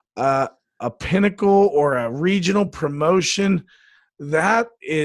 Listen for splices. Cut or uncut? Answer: uncut